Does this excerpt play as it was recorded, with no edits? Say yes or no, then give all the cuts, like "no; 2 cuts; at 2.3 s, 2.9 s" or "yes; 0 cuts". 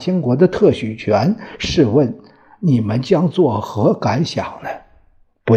yes; 0 cuts